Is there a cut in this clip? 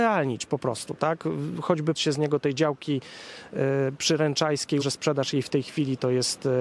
yes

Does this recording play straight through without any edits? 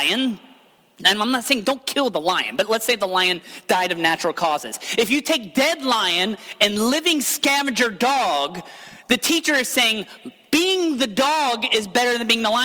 yes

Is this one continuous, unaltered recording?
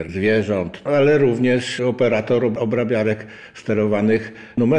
yes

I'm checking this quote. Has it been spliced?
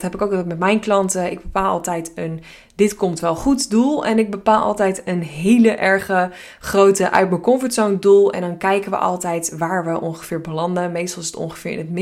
no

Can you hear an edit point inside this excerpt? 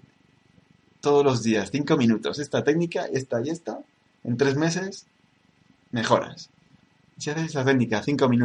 no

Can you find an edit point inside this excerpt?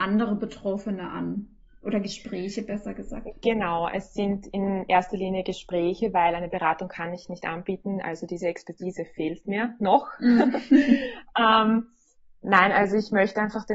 no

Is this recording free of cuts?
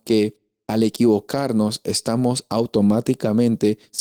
yes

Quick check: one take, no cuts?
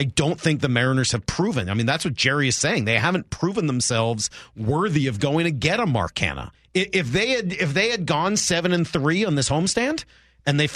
no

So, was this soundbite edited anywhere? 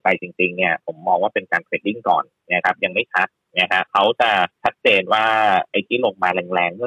yes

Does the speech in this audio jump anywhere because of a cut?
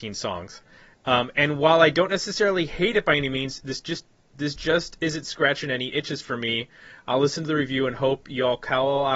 no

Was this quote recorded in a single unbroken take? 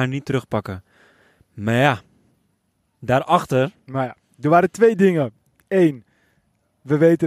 yes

